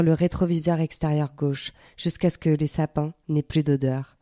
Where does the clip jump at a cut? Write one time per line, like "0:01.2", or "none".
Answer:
none